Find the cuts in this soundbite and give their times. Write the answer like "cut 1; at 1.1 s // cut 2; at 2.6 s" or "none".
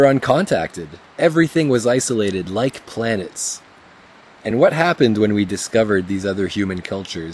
none

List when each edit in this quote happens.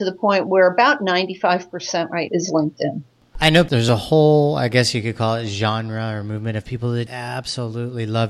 cut 1; at 2.3 s // cut 2; at 7.1 s

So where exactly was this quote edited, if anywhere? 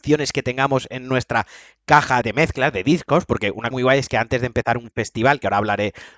cut 1; at 2.2 s // cut 2; at 3.7 s

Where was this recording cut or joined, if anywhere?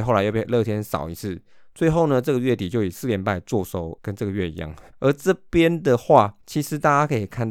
cut 1; at 4.0 s // cut 2; at 4.9 s // cut 3; at 6.4 s

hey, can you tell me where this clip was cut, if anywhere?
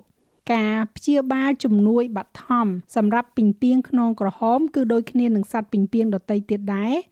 cut 1; at 2.9 s

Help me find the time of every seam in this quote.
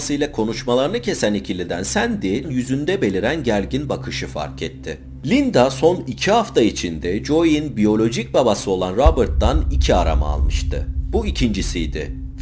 cut 1; at 2.4 s

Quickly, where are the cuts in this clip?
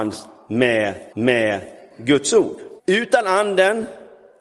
cut 1; at 1.1 s // cut 2; at 2.8 s

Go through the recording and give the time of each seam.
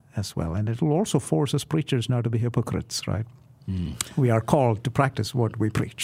none

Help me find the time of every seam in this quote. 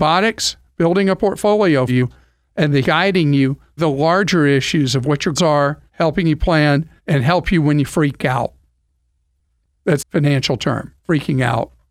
cut 1; at 1.9 s // cut 2; at 2.8 s // cut 3; at 3.8 s // cut 4; at 5.4 s // cut 5; at 5.9 s // cut 6; at 7.0 s // cut 7; at 10.0 s // cut 8; at 11.0 s

